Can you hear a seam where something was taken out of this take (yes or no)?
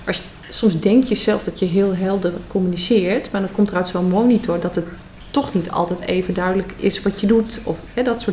no